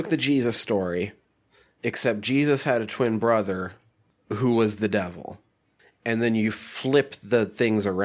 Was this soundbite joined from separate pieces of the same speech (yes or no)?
no